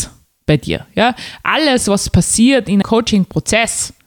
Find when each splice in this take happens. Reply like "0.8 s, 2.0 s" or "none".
2.8 s